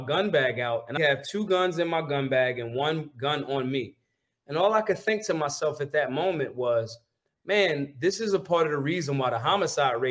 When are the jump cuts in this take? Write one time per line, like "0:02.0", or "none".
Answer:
0:01.0